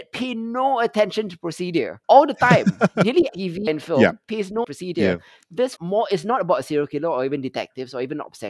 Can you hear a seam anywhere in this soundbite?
yes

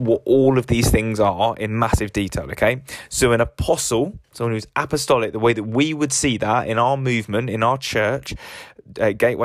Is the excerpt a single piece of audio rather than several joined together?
yes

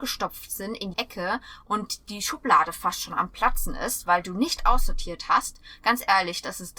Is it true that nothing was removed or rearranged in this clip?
no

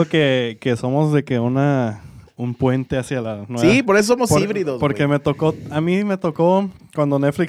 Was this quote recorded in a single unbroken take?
yes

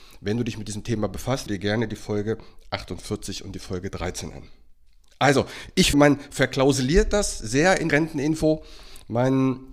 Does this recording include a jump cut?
yes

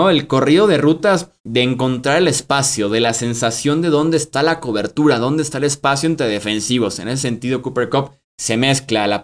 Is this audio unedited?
no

